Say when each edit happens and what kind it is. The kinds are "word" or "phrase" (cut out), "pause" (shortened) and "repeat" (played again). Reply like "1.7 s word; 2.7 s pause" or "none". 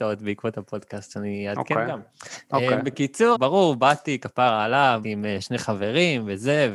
3.3 s word; 5.0 s word